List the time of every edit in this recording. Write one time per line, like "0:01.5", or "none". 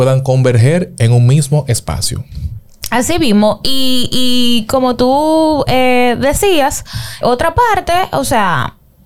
0:07.2

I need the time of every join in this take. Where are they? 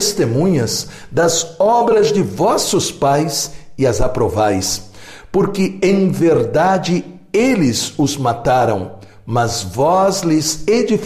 none

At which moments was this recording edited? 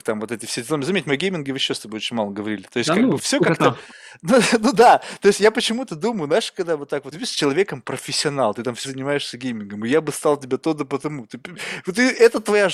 0:03.2
0:07.1
0:08.8

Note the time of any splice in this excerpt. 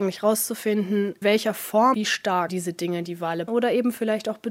0:01.2
0:01.9
0:02.5
0:03.5

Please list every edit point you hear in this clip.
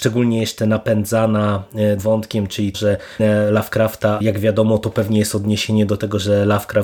0:02.0
0:02.7
0:03.2
0:04.2

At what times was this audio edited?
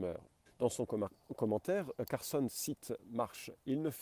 none

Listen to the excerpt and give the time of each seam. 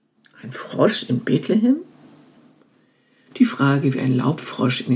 none

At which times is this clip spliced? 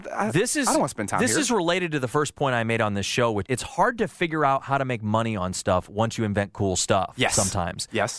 0:03.5

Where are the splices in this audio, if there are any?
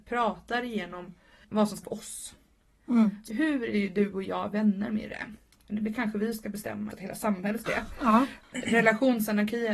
0:01.4
0:01.8
0:03.3
0:06.9
0:07.7

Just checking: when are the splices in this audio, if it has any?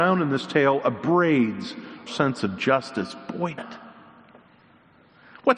0:02.1
0:03.6

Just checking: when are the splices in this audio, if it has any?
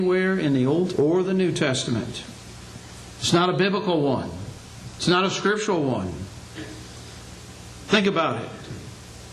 0:00.9

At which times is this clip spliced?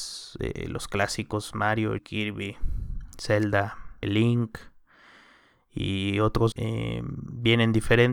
0:02.0
0:04.0
0:06.5

